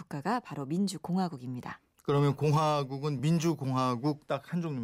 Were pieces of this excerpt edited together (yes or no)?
no